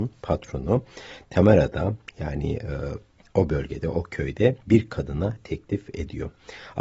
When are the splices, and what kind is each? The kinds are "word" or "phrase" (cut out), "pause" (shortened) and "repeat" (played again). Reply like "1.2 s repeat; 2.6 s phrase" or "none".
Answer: 4.6 s pause; 5.4 s word